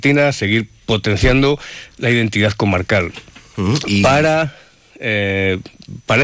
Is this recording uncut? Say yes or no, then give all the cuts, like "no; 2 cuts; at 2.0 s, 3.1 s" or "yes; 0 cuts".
yes; 0 cuts